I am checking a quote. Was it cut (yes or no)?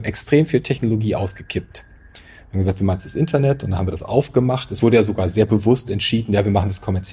no